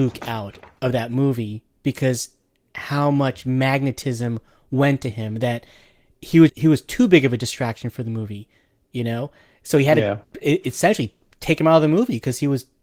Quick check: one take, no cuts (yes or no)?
no